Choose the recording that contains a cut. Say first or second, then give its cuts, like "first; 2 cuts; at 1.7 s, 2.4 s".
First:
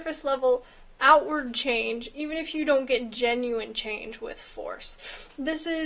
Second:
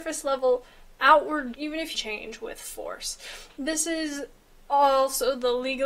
second; 2 cuts; at 1.5 s, 1.9 s